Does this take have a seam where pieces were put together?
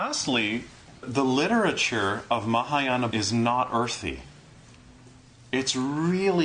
yes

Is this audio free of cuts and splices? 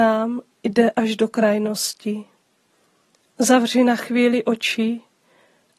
yes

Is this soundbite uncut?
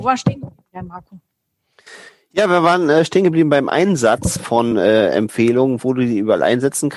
yes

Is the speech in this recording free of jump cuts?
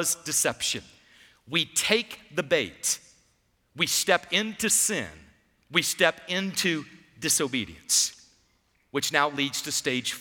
yes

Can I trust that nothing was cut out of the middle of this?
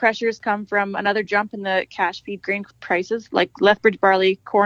yes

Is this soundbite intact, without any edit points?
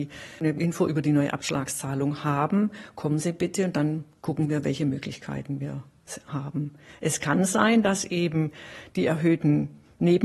yes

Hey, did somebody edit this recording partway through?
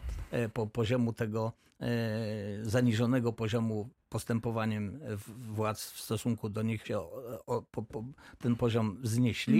yes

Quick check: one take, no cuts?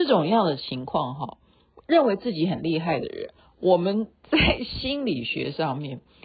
yes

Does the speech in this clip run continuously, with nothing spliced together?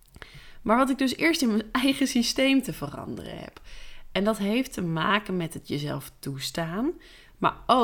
yes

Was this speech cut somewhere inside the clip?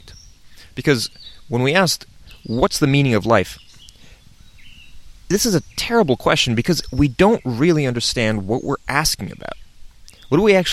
no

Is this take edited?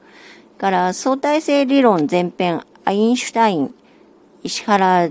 no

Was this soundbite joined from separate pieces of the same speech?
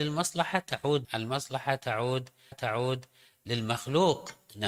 yes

